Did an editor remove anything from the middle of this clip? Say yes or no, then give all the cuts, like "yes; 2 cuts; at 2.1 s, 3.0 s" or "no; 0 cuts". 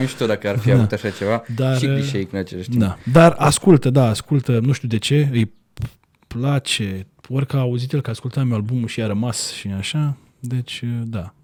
no; 0 cuts